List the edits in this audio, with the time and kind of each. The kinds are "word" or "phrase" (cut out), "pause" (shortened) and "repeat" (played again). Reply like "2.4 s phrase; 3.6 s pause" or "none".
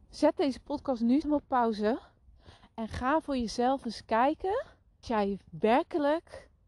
1.2 s phrase; 5.0 s word